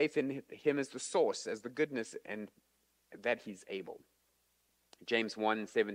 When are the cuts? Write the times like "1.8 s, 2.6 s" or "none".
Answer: none